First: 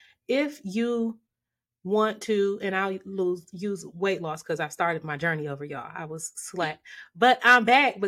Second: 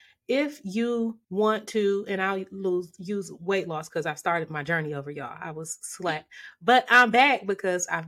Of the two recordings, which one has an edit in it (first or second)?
second